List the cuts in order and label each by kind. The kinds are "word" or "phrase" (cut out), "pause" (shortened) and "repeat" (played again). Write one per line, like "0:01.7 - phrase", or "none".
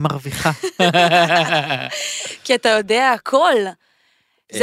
none